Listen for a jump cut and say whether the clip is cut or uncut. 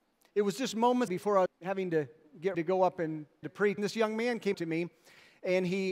cut